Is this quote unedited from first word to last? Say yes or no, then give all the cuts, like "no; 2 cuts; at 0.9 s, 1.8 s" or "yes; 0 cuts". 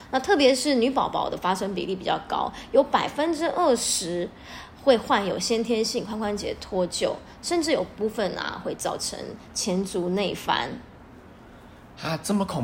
yes; 0 cuts